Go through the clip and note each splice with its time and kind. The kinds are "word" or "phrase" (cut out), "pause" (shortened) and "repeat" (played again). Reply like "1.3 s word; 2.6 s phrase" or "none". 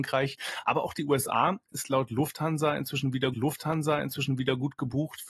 3.3 s repeat